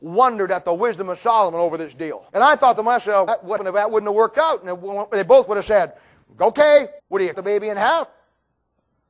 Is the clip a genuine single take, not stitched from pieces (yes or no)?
no